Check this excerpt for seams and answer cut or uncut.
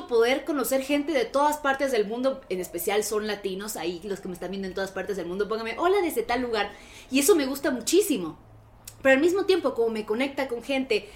uncut